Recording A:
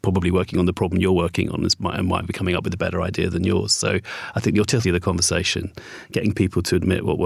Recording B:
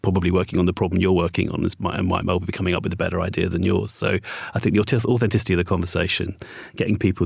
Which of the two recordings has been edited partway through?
A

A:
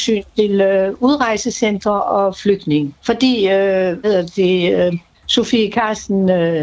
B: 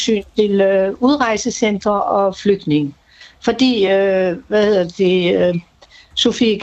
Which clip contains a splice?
A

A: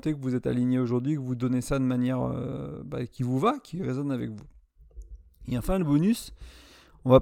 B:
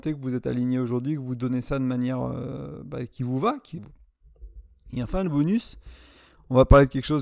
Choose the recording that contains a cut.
B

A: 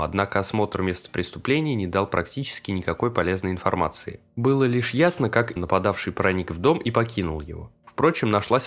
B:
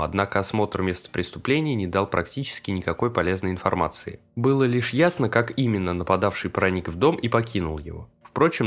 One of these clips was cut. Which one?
A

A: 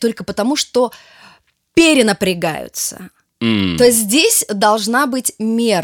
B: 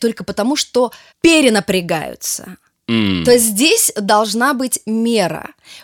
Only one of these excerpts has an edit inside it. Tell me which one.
B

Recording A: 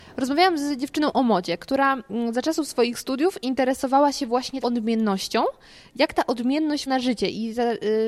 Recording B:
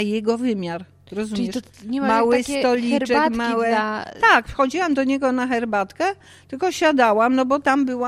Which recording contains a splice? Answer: A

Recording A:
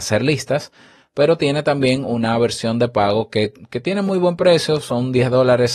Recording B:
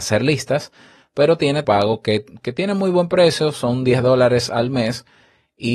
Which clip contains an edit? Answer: B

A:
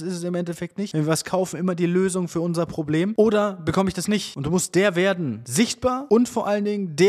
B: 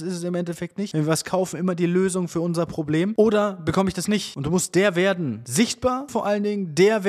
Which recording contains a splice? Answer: B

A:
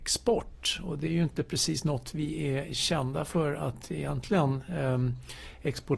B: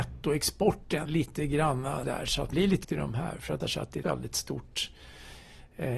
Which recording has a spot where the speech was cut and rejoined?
B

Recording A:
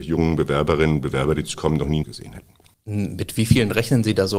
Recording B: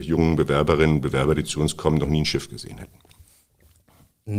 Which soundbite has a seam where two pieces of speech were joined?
A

